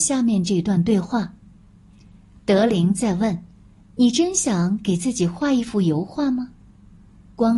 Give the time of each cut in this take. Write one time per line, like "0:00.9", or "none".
0:03.5
0:06.5